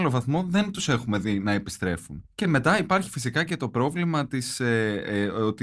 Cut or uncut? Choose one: uncut